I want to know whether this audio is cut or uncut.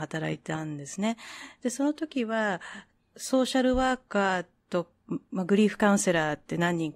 uncut